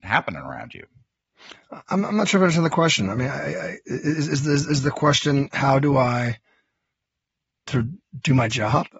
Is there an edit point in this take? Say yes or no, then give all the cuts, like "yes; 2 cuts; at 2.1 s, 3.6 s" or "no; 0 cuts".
no; 0 cuts